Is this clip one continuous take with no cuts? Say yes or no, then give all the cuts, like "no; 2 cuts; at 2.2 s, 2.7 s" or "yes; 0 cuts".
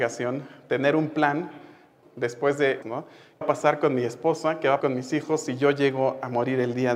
no; 4 cuts; at 2.0 s, 2.8 s, 3.4 s, 4.8 s